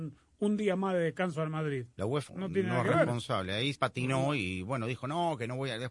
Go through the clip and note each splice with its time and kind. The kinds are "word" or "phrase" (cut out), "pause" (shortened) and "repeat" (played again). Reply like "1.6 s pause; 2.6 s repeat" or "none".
2.3 s word; 3.8 s word